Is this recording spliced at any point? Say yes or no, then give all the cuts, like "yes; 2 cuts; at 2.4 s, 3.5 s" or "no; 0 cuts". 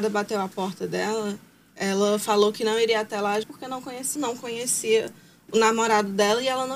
yes; 2 cuts; at 3.4 s, 4.2 s